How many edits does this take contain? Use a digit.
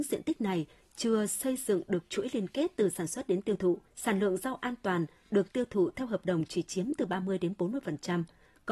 1